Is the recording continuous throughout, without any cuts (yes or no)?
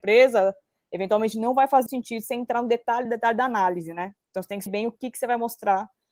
no